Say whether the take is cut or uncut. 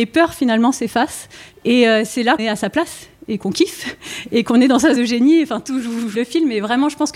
cut